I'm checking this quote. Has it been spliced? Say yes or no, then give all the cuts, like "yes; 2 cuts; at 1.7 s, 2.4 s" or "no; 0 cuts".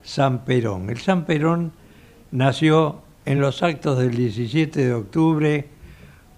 no; 0 cuts